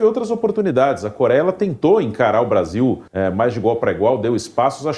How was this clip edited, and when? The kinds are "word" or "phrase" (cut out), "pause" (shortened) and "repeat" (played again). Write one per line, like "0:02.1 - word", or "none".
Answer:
0:03.1 - pause